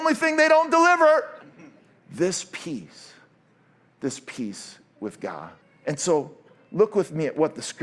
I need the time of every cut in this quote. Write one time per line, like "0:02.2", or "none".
0:01.4
0:05.6